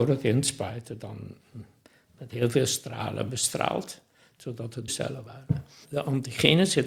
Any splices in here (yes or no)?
yes